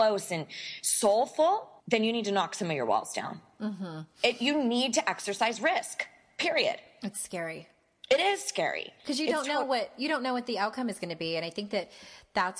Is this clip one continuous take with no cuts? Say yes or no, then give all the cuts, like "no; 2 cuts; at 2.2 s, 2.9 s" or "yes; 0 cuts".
no; 1 cut; at 1.8 s